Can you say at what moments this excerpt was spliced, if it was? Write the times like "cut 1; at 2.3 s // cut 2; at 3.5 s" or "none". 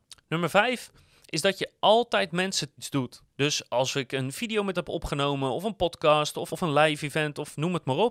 cut 1; at 2.8 s // cut 2; at 3.3 s // cut 3; at 4.7 s // cut 4; at 6.5 s